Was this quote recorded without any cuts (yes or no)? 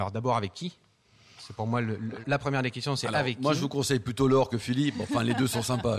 no